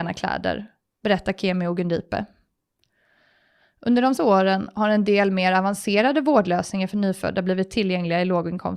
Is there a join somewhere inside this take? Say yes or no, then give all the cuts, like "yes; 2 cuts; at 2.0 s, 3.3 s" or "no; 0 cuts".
yes; 1 cut; at 4.2 s